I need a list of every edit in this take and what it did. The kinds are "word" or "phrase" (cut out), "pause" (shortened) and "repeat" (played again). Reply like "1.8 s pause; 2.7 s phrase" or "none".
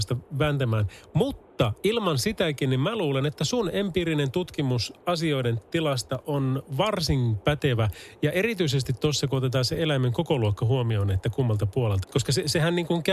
12.0 s word